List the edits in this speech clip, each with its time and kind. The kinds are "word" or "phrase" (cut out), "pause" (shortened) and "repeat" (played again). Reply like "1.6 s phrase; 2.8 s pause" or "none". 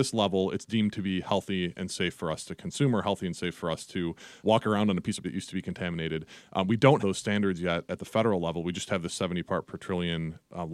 4.4 s word; 5.2 s word; 7.0 s word